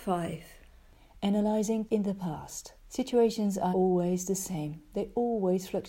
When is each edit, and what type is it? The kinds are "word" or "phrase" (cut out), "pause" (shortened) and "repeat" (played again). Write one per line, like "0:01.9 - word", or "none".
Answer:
0:01.9 - word
0:02.8 - pause
0:03.7 - word

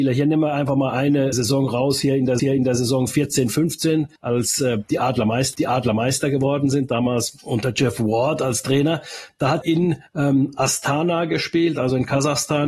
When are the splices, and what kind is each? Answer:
0:01.3 - word
0:02.4 - repeat
0:04.2 - pause
0:05.5 - repeat
0:09.6 - word
0:10.1 - pause

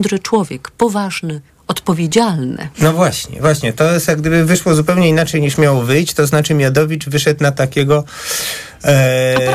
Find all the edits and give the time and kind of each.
0:02.7 - pause

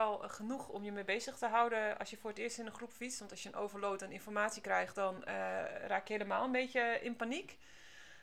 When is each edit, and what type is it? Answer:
none

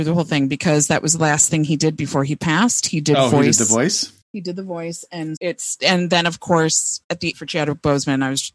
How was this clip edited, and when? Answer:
0:04.2 - pause
0:05.4 - word
0:07.3 - phrase

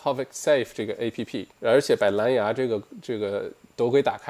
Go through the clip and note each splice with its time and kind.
0:01.5 - pause

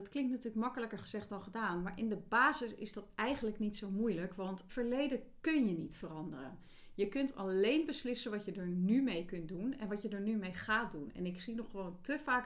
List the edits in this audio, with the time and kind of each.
0:04.7 - word

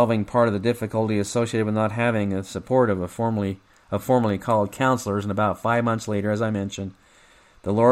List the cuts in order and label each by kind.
none

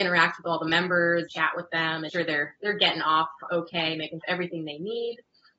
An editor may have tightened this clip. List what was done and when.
0:01.3 - phrase
0:02.1 - word
0:03.5 - word
0:04.2 - phrase

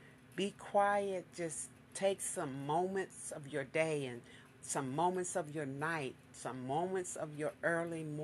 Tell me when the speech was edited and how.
none

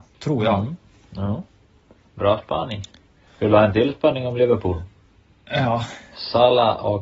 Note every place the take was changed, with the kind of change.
none

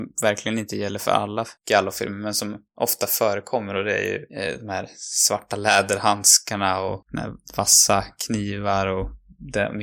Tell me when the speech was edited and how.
0:01.6 - pause
0:04.3 - pause

